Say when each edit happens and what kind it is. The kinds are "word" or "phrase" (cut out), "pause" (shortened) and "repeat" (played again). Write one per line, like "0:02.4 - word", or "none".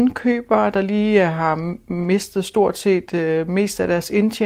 none